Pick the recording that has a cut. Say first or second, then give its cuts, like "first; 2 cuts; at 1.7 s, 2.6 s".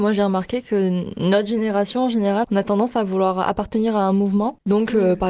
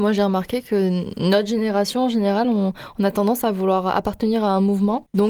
first; 1 cut; at 2.4 s